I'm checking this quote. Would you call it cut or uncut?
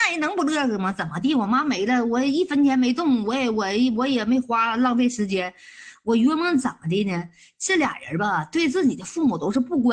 uncut